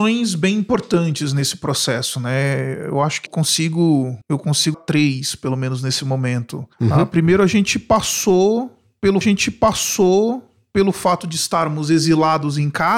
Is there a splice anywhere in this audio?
yes; 5 cuts; at 3.3 s, 4.2 s, 4.7 s, 6.7 s, 9.2 s

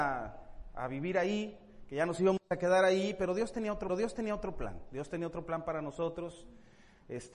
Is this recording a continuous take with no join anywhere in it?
no; 1 cut; at 3.9 s

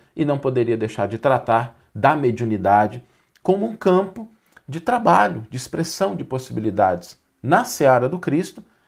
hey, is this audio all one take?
yes; 0 cuts

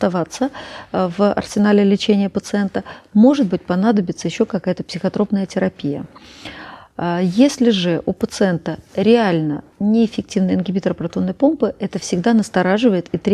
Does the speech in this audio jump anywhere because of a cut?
yes; 1 cut; at 9.7 s

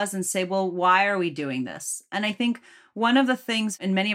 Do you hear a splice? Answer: no; 0 cuts

